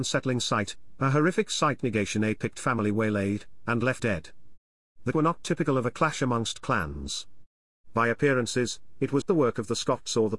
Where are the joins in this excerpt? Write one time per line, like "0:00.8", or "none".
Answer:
0:03.7
0:04.0
0:05.1
0:09.2

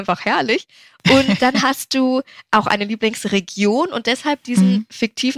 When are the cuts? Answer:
none

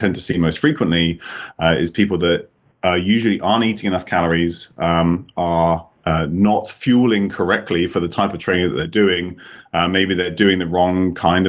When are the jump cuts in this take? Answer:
none

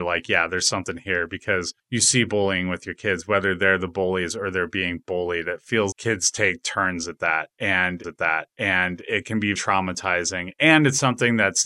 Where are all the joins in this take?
0:05.9
0:08.0
0:09.6

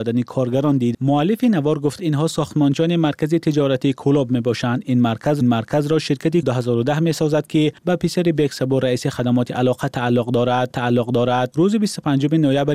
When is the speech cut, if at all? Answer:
0:00.9
0:02.0
0:05.4
0:06.4
0:07.8
0:10.7

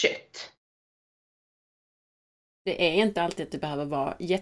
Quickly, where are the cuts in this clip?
none

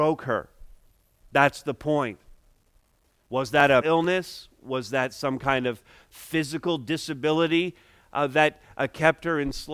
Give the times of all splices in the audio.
0:03.8

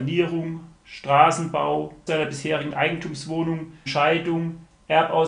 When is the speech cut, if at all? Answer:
0:02.1
0:03.9

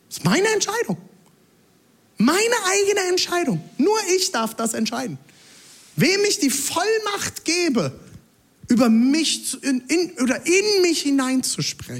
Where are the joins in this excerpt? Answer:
none

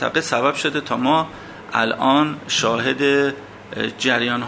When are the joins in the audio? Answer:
none

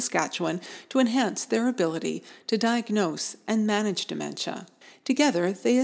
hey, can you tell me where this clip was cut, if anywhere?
0:04.8

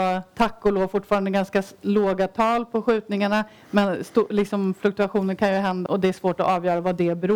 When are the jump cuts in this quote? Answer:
0:05.9

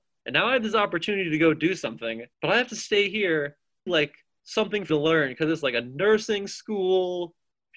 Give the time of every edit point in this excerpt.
0:02.3
0:03.9
0:04.9

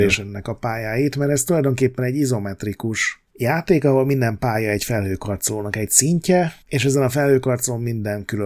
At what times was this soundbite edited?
0:03.3
0:06.6

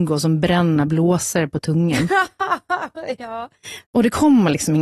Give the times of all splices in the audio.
0:03.8

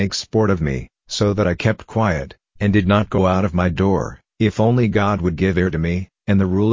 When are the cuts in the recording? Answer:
none

